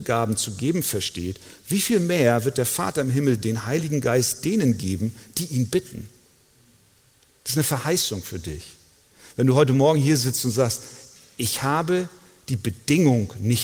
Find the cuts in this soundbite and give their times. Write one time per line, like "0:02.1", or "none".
none